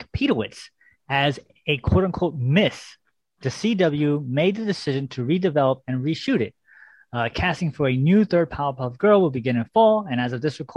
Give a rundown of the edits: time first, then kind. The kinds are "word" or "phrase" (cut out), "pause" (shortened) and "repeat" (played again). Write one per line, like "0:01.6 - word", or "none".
none